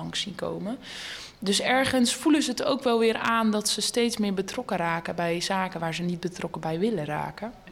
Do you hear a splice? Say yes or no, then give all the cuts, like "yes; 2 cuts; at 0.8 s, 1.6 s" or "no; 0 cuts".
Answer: no; 0 cuts